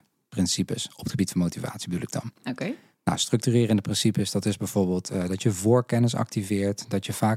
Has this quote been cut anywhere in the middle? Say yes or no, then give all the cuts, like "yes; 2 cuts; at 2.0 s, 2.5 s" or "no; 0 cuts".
no; 0 cuts